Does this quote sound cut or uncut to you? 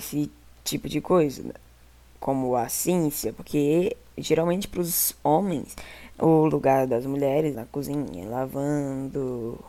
cut